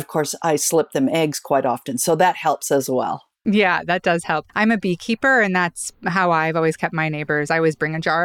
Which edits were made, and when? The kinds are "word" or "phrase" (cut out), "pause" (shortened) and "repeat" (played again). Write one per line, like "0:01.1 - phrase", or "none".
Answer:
0:04.5 - pause